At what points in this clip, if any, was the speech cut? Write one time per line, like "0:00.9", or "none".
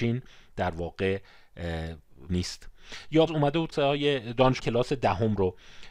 0:02.3
0:03.3
0:03.7
0:04.6

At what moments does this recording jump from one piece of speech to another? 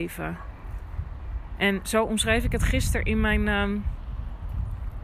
none

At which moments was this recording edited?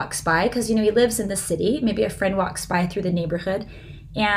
none

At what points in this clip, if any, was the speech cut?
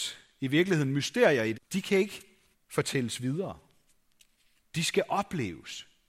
0:01.5
0:02.5

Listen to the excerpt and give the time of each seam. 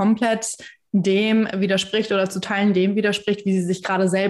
none

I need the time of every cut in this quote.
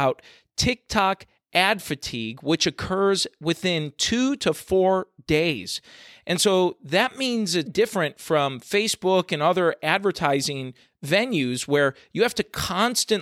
0:07.7

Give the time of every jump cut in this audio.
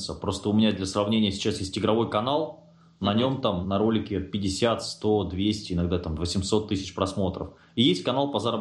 0:03.6

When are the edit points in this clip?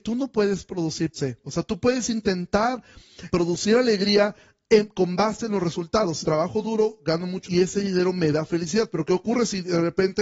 0:01.1
0:03.3
0:06.2
0:07.5

